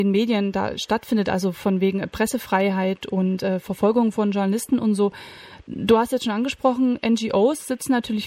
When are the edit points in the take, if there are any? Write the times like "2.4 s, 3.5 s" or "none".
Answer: none